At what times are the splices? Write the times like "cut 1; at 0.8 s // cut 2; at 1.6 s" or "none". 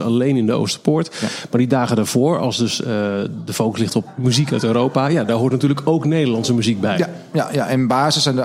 none